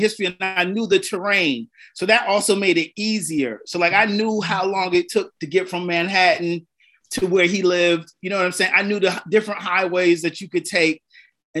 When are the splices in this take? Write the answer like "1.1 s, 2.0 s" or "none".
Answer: none